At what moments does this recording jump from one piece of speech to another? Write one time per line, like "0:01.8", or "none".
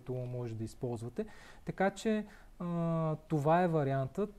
none